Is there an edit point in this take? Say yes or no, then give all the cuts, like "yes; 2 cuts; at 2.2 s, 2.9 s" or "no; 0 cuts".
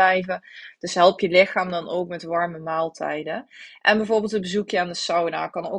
no; 0 cuts